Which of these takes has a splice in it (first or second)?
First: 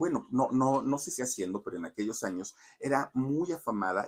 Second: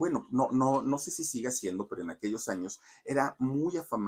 first